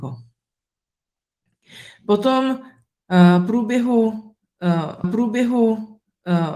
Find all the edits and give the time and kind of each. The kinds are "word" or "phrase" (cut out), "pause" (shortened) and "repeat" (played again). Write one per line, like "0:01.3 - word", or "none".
0:05.0 - repeat